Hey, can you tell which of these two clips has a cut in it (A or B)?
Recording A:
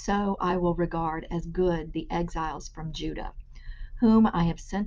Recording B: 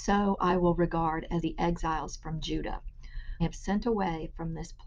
B